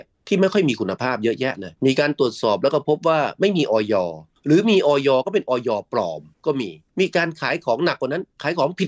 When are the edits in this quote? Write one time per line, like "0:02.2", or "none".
0:01.8